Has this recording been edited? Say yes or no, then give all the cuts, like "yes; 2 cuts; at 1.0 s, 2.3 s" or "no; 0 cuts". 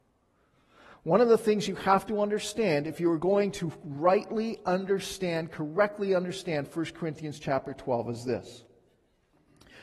no; 0 cuts